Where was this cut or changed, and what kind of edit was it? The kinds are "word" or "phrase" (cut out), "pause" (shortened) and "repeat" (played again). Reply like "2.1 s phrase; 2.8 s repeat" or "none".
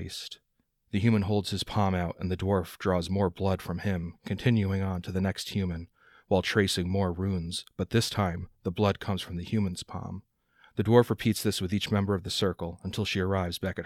none